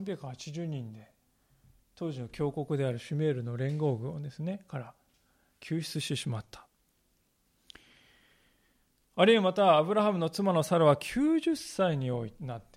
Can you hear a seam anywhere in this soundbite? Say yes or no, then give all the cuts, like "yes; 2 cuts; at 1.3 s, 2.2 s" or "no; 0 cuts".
no; 0 cuts